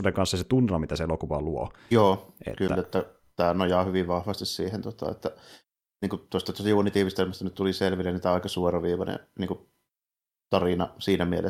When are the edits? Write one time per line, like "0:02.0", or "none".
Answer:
none